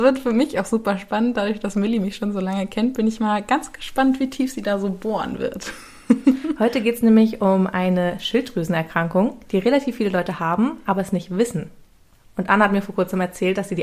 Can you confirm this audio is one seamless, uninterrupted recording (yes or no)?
yes